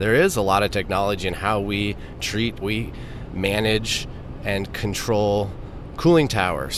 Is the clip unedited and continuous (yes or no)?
no